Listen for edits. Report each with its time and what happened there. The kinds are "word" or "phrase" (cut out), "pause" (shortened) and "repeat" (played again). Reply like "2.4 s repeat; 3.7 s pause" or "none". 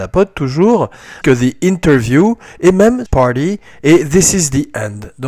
1.2 s word; 3.1 s word